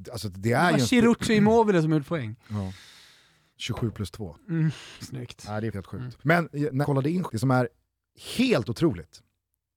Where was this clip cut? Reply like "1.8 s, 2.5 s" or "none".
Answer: 2.1 s, 4.9 s, 5.7 s, 6.2 s, 6.8 s, 7.3 s